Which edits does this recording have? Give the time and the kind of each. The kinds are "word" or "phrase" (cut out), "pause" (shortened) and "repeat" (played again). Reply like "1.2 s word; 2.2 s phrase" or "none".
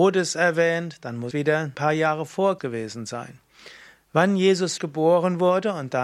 1.3 s word; 1.7 s word; 2.6 s word; 4.8 s word